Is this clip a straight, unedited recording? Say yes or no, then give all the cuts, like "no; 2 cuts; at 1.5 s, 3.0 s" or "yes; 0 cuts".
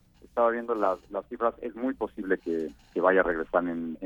yes; 0 cuts